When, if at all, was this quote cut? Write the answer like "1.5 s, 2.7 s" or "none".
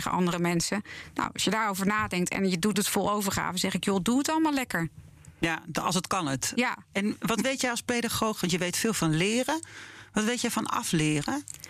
2.7 s, 6.1 s